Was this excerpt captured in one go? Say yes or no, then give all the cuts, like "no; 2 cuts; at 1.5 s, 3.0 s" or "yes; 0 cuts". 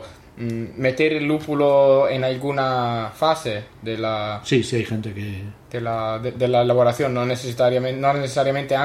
yes; 0 cuts